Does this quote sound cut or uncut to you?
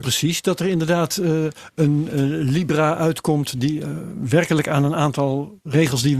uncut